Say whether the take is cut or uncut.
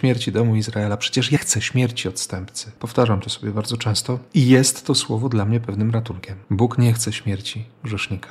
cut